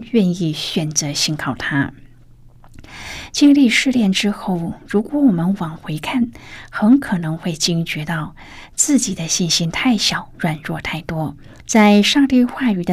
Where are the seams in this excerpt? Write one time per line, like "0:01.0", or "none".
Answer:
0:10.3
0:11.5